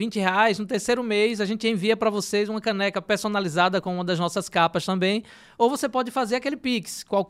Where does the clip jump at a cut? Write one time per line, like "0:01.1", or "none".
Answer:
none